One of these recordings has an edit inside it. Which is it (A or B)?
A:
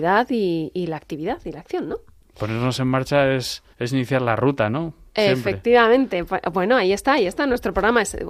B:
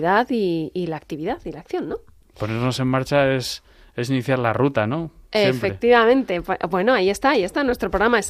A